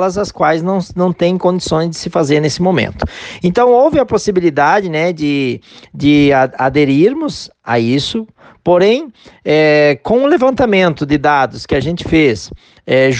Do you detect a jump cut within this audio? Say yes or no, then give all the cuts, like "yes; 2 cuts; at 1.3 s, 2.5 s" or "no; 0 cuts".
no; 0 cuts